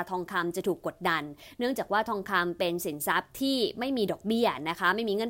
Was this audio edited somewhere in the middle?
no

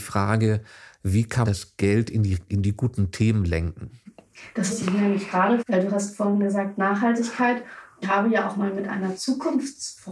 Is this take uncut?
no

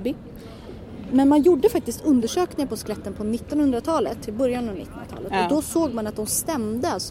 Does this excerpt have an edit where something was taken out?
no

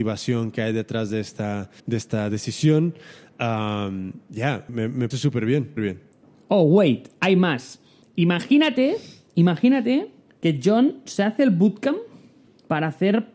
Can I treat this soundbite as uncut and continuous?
no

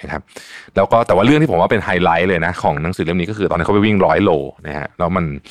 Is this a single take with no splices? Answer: yes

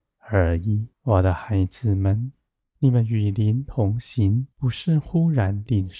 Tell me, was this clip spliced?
yes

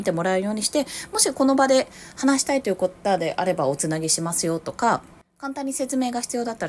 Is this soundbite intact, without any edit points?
yes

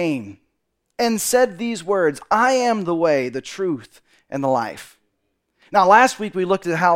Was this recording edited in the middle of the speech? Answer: no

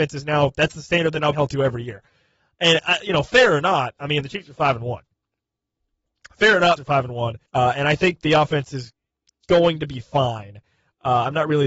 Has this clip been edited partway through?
yes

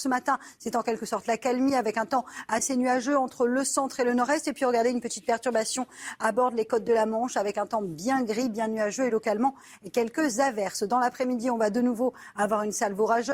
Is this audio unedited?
yes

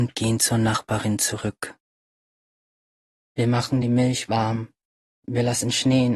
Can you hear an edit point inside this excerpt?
no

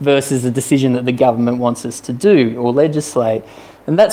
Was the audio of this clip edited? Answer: no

